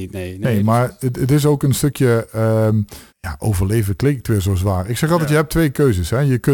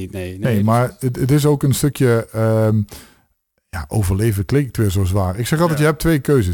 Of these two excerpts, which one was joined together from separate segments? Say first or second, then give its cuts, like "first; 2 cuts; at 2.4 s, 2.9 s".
first; 1 cut; at 3.1 s